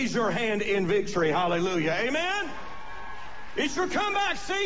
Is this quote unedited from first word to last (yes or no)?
yes